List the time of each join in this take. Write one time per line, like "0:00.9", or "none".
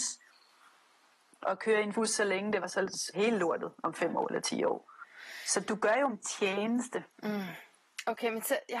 0:01.9
0:02.6
0:03.1
0:06.1
0:07.1